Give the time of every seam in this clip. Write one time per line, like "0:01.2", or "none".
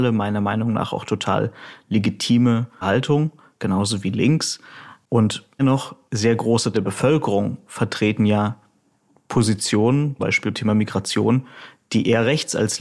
0:02.8
0:05.6
0:06.7
0:10.2
0:10.5